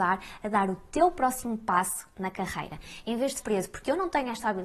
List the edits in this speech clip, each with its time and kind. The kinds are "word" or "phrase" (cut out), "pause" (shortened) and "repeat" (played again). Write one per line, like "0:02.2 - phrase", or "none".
0:03.4 - word